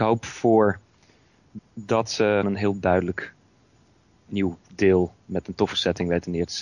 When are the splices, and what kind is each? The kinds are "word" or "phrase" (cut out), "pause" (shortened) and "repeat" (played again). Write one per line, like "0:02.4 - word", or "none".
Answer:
0:01.6 - word
0:02.4 - word